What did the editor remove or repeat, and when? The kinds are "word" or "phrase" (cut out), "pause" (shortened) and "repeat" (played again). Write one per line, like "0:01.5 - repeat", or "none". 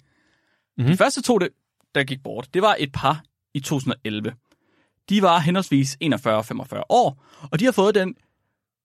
none